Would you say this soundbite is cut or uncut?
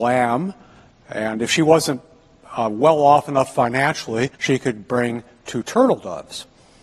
cut